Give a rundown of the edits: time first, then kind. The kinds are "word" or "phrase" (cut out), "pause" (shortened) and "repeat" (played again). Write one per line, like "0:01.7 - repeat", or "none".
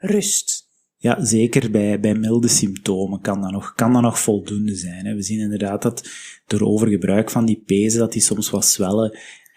none